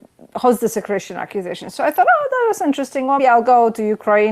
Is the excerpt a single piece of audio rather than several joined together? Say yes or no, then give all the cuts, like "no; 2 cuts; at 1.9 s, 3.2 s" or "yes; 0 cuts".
no; 1 cut; at 3.2 s